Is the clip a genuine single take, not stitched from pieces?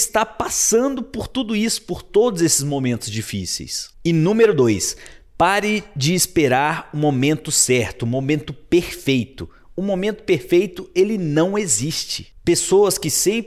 yes; 0 cuts

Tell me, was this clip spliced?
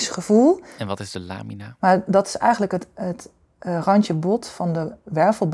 no; 0 cuts

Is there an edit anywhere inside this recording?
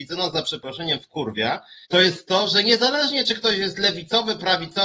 yes; 1 cut; at 1.8 s

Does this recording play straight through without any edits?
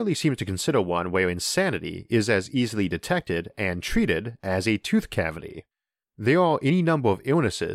yes; 0 cuts

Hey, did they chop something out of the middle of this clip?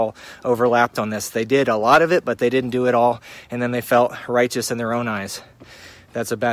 no; 0 cuts

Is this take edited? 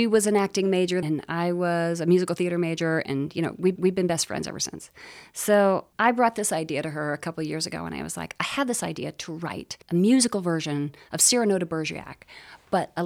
yes; 4 cuts; at 1.0 s, 3.8 s, 5.9 s, 9.8 s

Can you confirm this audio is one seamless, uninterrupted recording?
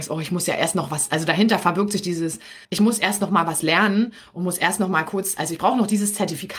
no; 1 cut; at 2.6 s

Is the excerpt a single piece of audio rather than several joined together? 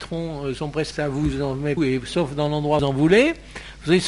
no; 3 cuts; at 0.9 s, 1.8 s, 2.8 s

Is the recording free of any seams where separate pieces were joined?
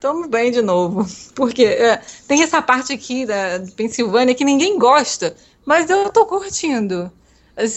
yes; 0 cuts

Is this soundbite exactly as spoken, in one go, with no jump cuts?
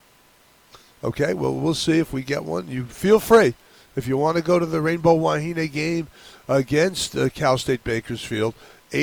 yes; 0 cuts

